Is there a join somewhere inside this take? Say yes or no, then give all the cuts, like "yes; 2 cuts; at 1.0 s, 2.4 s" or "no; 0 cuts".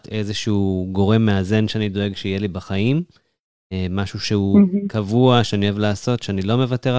no; 0 cuts